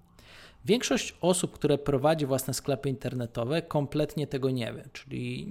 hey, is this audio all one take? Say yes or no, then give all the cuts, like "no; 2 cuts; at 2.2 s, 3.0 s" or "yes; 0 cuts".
yes; 0 cuts